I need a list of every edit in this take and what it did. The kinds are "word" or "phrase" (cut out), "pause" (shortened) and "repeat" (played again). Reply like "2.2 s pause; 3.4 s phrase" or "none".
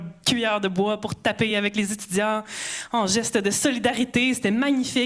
none